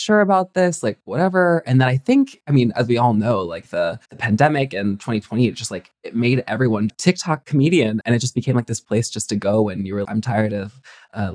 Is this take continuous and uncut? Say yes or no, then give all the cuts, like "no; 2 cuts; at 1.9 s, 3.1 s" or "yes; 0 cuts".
no; 4 cuts; at 4.0 s, 6.9 s, 8.0 s, 10.0 s